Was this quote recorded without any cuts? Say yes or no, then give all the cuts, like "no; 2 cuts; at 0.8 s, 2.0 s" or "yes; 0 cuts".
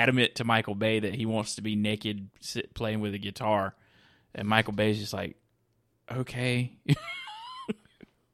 yes; 0 cuts